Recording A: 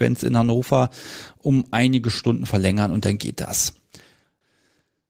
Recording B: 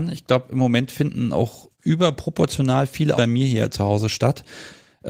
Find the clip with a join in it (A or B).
B